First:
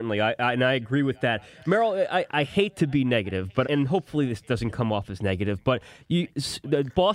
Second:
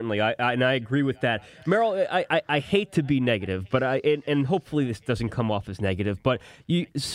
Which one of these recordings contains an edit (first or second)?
first